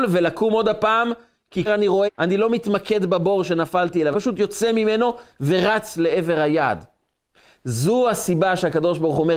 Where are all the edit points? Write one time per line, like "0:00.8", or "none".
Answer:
0:01.7
0:02.1
0:04.1